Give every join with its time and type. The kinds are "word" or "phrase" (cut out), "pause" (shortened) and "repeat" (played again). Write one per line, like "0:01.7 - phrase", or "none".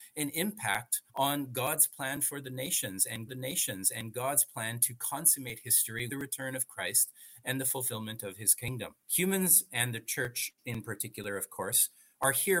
0:01.1 - pause
0:03.3 - repeat
0:06.1 - word
0:09.0 - pause